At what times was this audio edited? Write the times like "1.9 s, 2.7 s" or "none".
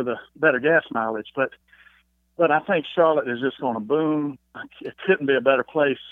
none